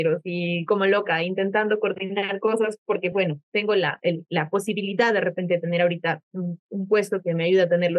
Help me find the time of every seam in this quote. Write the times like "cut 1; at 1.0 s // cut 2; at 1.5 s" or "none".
none